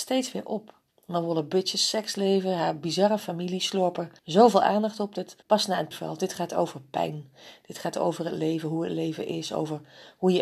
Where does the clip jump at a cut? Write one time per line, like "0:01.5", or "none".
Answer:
0:04.2
0:05.4
0:05.9